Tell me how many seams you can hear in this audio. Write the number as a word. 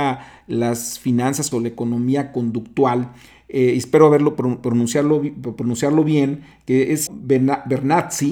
two